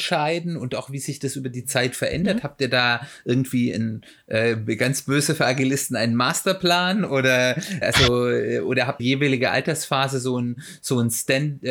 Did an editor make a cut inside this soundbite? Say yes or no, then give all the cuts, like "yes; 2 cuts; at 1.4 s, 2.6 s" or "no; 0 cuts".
yes; 2 cuts; at 7.8 s, 9.0 s